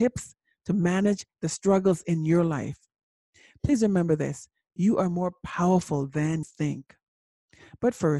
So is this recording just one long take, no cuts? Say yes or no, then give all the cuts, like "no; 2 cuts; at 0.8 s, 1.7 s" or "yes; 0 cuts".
no; 1 cut; at 6.4 s